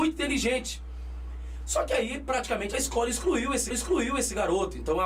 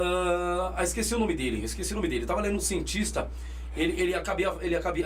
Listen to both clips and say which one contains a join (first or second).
first